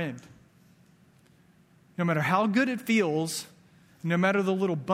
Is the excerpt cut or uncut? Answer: uncut